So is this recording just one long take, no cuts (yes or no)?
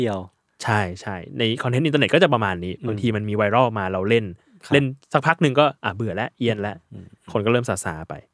no